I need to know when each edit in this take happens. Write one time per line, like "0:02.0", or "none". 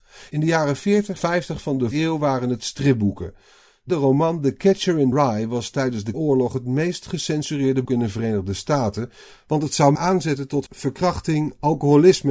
0:01.2
0:01.9
0:03.9
0:05.1
0:06.1
0:07.8
0:09.9
0:10.7